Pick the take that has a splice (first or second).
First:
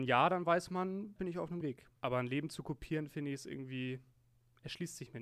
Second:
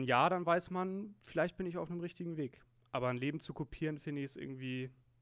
first